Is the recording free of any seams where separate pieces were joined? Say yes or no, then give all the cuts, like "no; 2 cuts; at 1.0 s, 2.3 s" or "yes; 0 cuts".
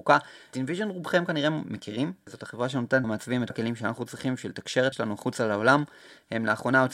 no; 3 cuts; at 3.0 s, 3.5 s, 4.9 s